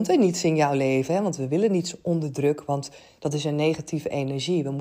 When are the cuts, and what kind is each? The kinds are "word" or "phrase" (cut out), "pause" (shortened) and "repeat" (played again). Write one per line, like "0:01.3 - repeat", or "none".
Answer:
none

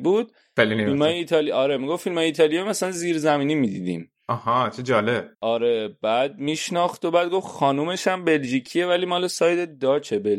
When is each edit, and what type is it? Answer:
0:05.3 - pause

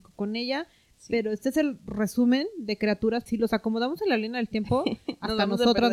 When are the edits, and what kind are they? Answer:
0:03.3 - word

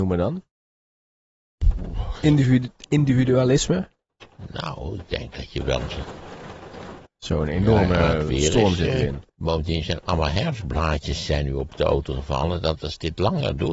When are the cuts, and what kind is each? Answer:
0:07.0 - pause
0:09.3 - pause

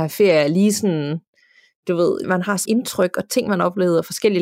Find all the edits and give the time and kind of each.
0:02.2 - word
0:02.7 - word

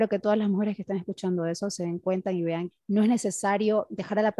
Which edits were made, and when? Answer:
0:02.7 - word

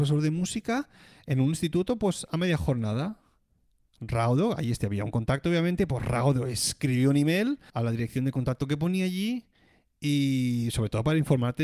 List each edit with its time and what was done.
none

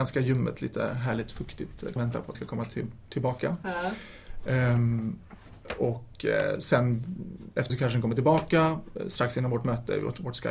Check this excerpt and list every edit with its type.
0:02.0 - phrase
0:02.3 - word
0:07.7 - phrase

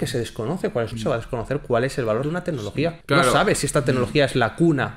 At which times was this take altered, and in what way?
0:00.9 - phrase
0:02.2 - word
0:03.0 - pause

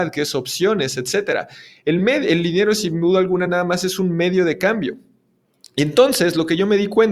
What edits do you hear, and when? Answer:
none

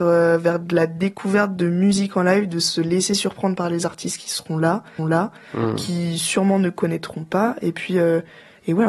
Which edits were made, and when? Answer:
0:05.0 - repeat

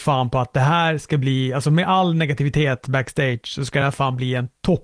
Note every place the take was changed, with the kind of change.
none

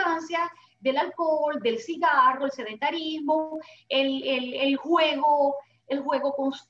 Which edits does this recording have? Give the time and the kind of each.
none

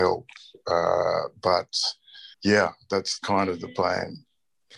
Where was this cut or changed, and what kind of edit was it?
0:02.3 - pause
0:03.2 - word

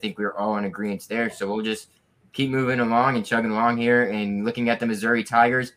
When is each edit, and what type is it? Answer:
none

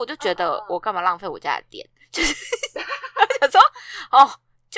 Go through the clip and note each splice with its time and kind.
none

